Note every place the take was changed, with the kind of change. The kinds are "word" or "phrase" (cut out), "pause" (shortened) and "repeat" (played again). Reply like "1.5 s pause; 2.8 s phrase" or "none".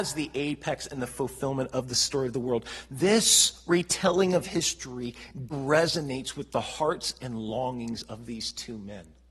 5.5 s word